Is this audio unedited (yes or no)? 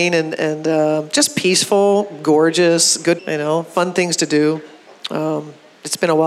no